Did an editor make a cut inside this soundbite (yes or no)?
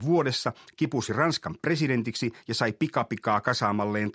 no